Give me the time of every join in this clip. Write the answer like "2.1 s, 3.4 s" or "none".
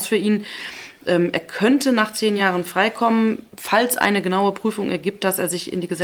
none